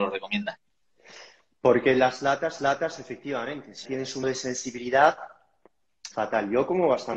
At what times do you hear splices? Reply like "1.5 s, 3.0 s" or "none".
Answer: 2.6 s, 3.8 s, 4.2 s, 6.1 s